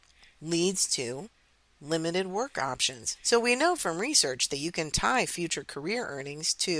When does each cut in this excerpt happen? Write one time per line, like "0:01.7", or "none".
none